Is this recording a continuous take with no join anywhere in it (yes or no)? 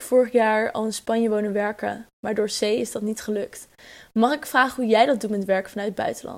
yes